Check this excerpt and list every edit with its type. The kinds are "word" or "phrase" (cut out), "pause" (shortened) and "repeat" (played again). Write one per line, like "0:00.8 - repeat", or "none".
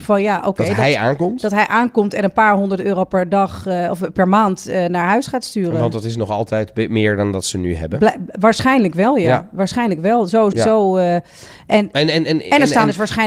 0:10.5 - word